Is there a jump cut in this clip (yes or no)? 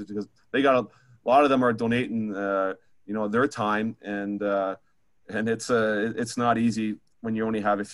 no